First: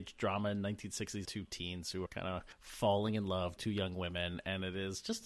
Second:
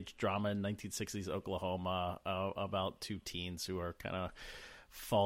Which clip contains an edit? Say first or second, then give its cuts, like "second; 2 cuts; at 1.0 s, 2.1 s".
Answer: first; 4 cuts; at 1.2 s, 2.1 s, 2.5 s, 3.6 s